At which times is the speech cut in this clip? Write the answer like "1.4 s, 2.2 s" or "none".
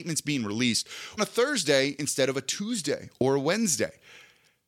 1.2 s